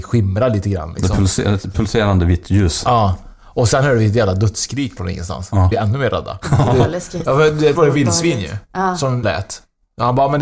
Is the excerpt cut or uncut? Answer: cut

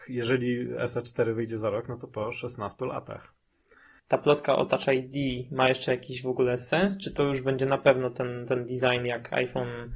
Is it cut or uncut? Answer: uncut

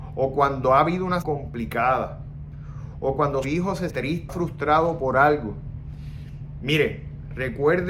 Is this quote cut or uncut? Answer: cut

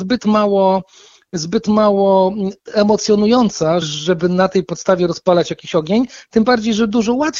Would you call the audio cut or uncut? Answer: cut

